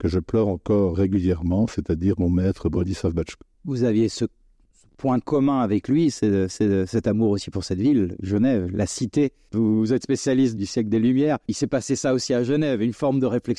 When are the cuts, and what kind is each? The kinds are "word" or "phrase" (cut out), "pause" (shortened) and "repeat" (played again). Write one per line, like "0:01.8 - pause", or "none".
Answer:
0:00.9 - word
0:03.5 - pause
0:06.5 - repeat
0:10.6 - word